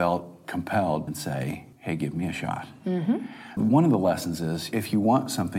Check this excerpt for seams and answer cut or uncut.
cut